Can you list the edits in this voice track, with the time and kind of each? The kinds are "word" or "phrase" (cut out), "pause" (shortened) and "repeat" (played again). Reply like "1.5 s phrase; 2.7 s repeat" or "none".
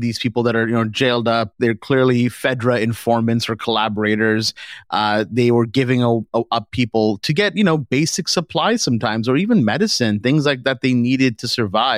none